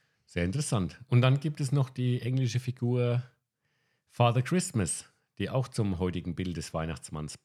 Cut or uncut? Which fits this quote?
uncut